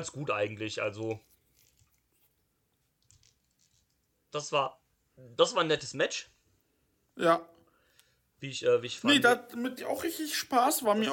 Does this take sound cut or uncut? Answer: cut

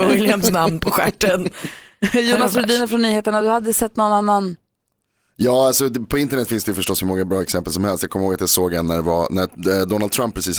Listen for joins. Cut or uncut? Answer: uncut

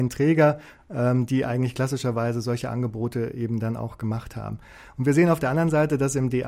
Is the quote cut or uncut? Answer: uncut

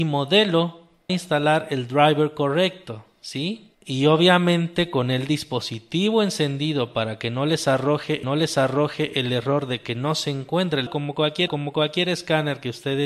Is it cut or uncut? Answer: cut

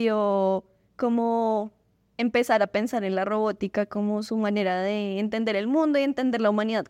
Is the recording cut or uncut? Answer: uncut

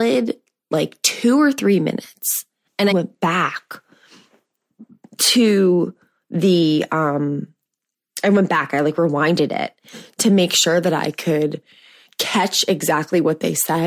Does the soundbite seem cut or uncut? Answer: cut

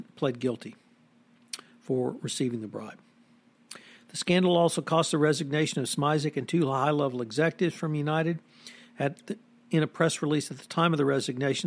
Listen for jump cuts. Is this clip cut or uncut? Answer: uncut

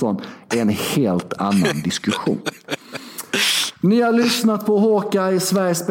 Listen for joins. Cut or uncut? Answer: uncut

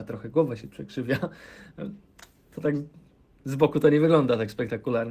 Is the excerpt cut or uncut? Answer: uncut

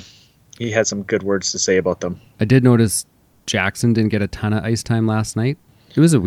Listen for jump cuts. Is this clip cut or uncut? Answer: uncut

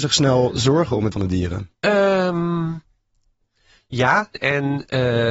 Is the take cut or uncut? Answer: cut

